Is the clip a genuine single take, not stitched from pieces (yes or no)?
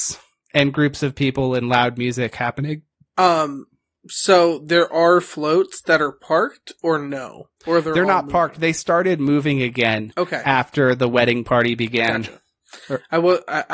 yes